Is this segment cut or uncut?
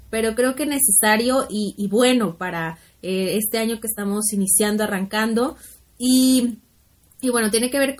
uncut